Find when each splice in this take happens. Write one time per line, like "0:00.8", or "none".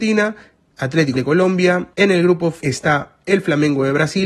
0:01.2
0:01.9
0:02.6